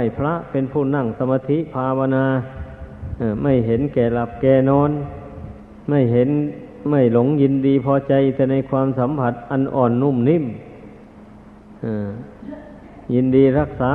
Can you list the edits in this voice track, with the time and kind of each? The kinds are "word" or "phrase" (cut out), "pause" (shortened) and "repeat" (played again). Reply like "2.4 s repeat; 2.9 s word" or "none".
13.0 s pause